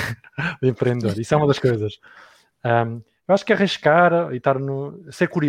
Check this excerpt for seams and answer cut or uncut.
uncut